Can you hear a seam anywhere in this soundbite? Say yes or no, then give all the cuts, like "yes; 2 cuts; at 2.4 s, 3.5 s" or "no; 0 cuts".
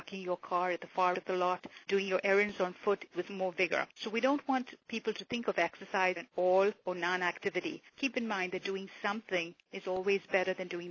yes; 6 cuts; at 1.1 s, 1.8 s, 3.1 s, 3.9 s, 6.2 s, 7.9 s